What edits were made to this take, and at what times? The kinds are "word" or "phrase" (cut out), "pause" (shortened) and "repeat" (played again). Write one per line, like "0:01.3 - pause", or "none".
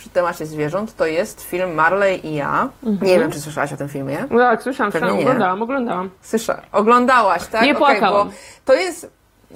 0:02.8 - pause
0:06.2 - pause